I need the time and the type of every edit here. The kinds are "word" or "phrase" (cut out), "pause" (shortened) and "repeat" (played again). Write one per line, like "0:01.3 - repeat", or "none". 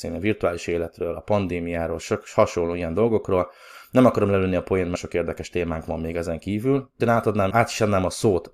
0:05.0 - word
0:07.0 - word
0:07.5 - word